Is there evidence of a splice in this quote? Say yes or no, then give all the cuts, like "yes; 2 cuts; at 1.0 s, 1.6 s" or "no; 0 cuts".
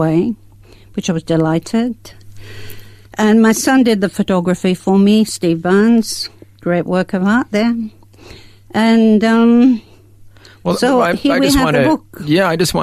no; 0 cuts